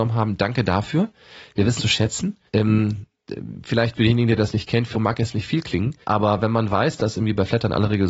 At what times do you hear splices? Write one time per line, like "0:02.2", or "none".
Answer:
0:01.8
0:02.5
0:04.9
0:06.0